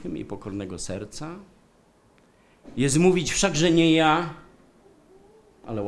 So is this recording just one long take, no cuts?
yes; 0 cuts

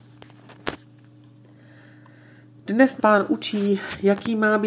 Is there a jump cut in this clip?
yes; 1 cut; at 3.0 s

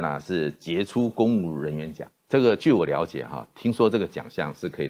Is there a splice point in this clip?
yes; 1 cut; at 2.2 s

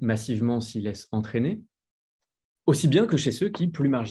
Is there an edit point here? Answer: no; 0 cuts

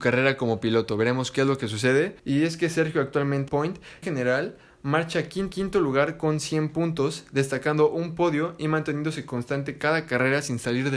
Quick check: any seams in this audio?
yes; 4 cuts; at 2.2 s, 3.5 s, 4.0 s, 5.5 s

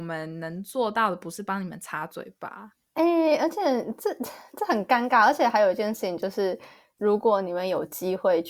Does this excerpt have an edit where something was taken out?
no; 0 cuts

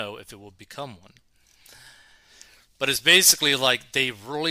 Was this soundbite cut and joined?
no; 0 cuts

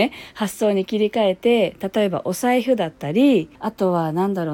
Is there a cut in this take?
yes; 1 cut; at 3.5 s

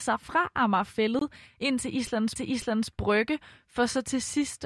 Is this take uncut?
no; 1 cut; at 2.4 s

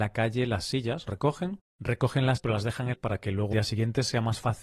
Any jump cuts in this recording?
yes; 4 cuts; at 1.1 s, 2.4 s, 2.9 s, 3.5 s

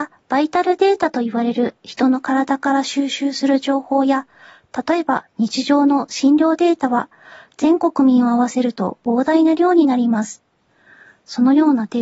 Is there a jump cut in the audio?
no; 0 cuts

